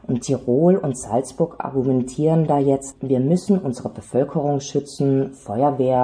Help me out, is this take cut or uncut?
cut